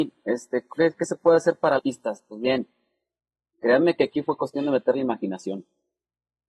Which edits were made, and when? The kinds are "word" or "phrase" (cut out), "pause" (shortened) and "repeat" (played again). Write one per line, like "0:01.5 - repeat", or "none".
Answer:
0:01.8 - word